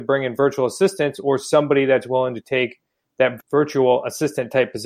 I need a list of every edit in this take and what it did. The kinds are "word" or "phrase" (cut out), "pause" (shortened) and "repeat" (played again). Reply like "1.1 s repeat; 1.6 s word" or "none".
none